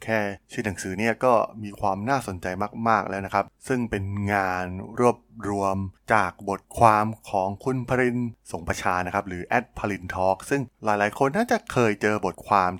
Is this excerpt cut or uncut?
cut